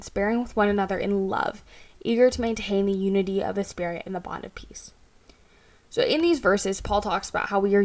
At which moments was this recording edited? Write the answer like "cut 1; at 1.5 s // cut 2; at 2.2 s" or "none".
none

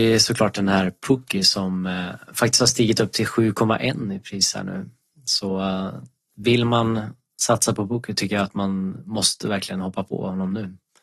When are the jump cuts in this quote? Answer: none

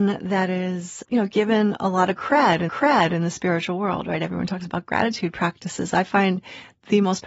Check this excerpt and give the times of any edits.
cut 1; at 1.0 s // cut 2; at 2.7 s

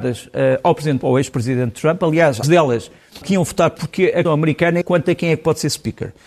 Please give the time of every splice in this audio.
cut 1; at 1.0 s // cut 2; at 2.4 s // cut 3; at 3.2 s // cut 4; at 3.8 s // cut 5; at 4.2 s // cut 6; at 4.8 s

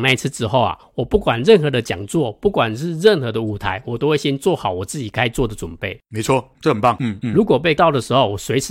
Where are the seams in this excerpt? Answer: cut 1; at 6.5 s // cut 2; at 7.8 s

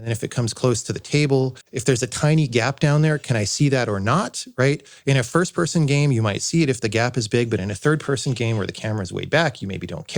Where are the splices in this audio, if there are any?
cut 1; at 1.6 s

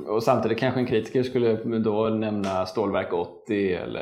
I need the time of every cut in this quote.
none

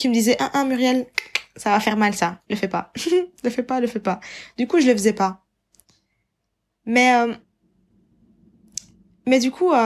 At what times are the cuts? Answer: none

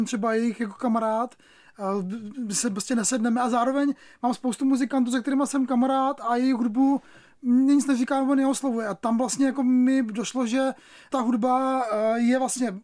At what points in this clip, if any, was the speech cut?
none

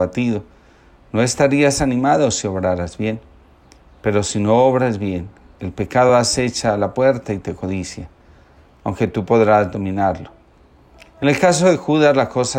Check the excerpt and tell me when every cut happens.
none

